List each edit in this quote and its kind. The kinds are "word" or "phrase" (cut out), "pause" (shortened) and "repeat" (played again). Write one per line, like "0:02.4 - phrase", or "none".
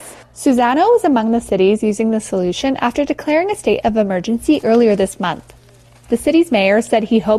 none